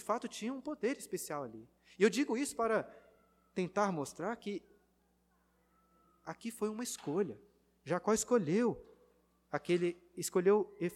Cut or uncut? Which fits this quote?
uncut